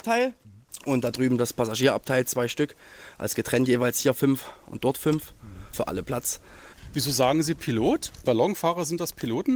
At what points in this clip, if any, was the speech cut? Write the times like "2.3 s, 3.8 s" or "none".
5.7 s